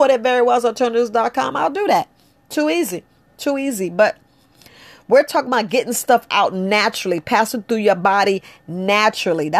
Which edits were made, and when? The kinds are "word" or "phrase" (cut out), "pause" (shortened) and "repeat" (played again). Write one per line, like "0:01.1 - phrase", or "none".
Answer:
none